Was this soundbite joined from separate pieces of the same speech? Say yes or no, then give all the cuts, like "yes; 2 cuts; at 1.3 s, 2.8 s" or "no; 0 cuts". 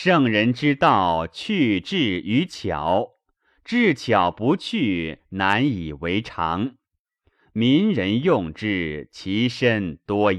no; 0 cuts